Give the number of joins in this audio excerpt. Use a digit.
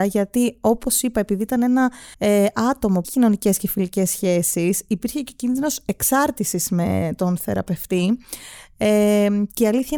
2